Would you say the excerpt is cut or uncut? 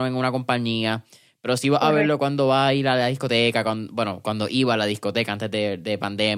uncut